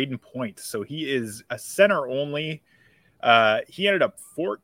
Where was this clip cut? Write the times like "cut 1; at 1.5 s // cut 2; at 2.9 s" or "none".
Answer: none